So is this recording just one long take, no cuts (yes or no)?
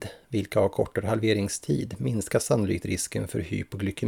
yes